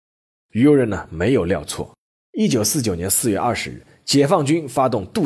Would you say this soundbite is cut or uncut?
uncut